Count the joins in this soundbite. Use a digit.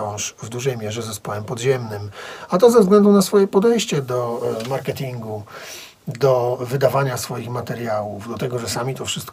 0